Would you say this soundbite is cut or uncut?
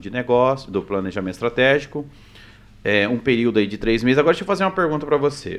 uncut